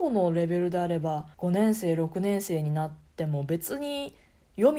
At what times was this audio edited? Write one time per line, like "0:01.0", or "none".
0:01.3